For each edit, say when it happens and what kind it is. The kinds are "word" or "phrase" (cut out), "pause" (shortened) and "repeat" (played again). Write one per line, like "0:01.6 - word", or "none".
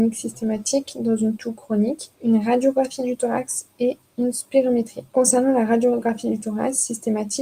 0:02.1 - pause
0:05.1 - pause